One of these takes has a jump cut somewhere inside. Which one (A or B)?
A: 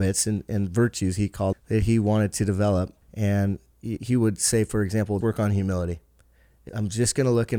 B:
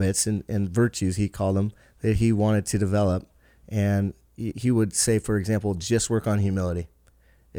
A